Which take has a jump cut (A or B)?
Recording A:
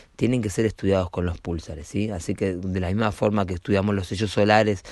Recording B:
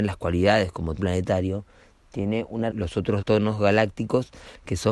B